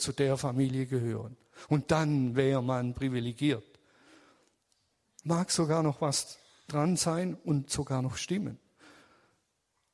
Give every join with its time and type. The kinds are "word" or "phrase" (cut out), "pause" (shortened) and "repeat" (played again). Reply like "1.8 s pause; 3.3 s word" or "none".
none